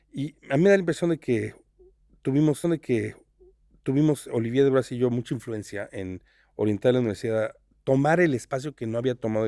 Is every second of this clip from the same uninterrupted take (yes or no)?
no